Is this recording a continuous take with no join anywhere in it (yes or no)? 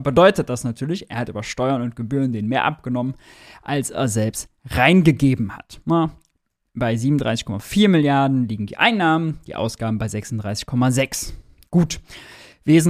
yes